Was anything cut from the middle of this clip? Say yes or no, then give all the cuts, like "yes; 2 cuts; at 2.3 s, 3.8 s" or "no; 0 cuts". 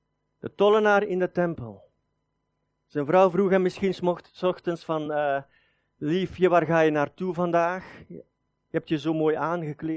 no; 0 cuts